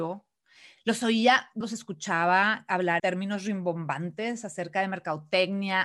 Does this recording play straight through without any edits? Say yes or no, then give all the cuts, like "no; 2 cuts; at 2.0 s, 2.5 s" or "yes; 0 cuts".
no; 2 cuts; at 1.6 s, 3.0 s